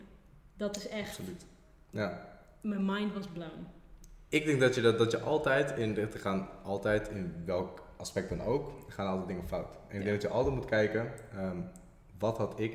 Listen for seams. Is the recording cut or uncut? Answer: uncut